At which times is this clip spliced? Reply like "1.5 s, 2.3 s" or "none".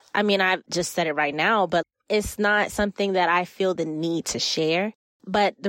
none